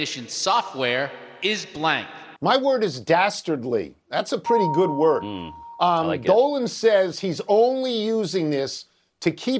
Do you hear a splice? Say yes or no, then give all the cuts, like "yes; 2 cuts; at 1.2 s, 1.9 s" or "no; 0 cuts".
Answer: yes; 1 cut; at 2.4 s